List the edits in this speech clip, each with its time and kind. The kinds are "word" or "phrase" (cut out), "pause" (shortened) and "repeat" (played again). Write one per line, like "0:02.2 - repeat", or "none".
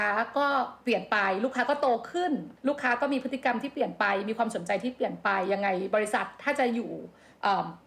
0:02.6 - pause